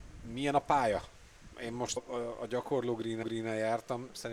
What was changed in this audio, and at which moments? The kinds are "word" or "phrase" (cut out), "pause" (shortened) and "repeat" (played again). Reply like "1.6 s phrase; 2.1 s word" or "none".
1.5 s pause; 2.0 s word; 3.2 s repeat